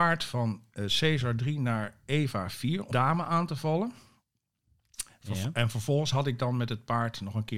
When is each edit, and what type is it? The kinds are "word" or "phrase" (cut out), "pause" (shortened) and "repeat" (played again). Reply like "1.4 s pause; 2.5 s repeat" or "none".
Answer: 2.9 s word